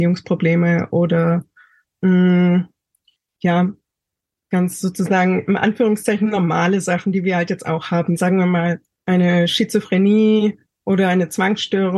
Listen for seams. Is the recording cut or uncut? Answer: cut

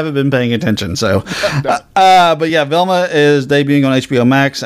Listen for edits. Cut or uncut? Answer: uncut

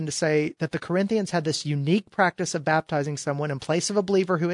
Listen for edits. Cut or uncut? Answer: uncut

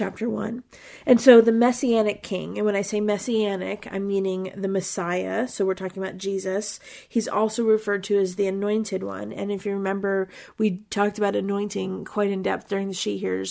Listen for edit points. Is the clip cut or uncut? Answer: uncut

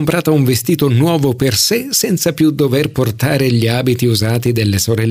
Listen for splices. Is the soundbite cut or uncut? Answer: uncut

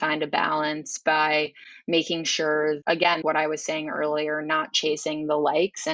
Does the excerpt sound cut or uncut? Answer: cut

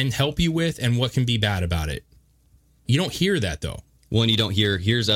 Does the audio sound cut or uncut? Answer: uncut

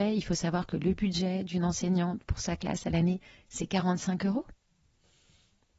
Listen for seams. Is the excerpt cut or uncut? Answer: uncut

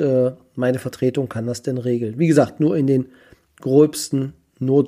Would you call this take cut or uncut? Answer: uncut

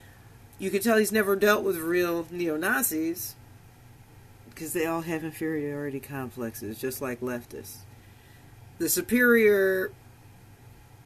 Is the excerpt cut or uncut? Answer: uncut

